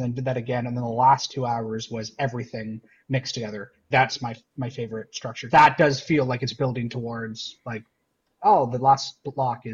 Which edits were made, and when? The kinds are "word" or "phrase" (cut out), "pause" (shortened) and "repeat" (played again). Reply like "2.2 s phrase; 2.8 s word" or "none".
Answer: 3.9 s phrase; 5.5 s word

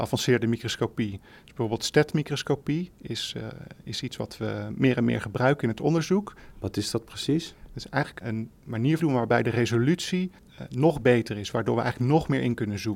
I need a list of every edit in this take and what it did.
3.0 s pause; 8.2 s word; 9.0 s phrase; 10.4 s pause

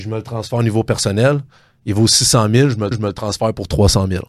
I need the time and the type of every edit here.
2.9 s repeat

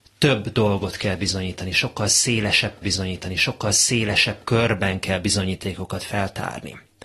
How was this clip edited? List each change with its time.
2.8 s repeat

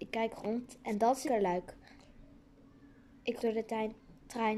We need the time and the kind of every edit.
1.2 s word; 3.4 s word

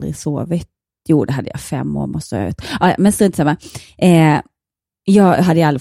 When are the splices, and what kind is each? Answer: none

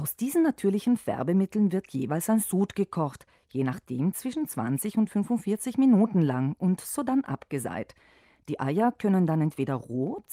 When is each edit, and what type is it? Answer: none

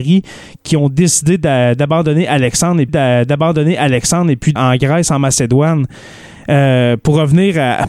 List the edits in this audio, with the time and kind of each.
2.9 s repeat; 4.6 s word

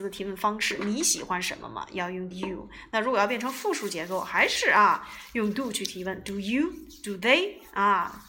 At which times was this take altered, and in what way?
2.3 s word

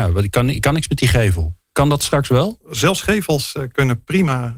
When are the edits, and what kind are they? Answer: 1.6 s pause

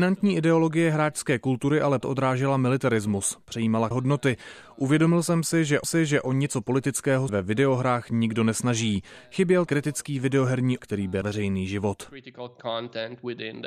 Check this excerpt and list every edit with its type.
2.0 s word; 3.9 s word; 5.8 s repeat; 7.3 s word; 9.7 s word; 10.8 s word; 11.2 s word

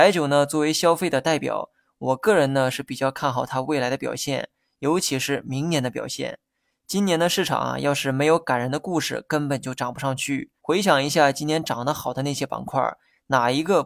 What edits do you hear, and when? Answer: 10.6 s pause

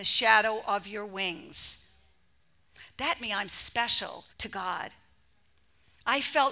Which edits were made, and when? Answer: 3.2 s word; 4.3 s pause

